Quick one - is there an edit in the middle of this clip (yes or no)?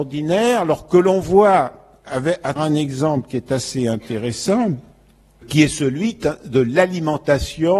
yes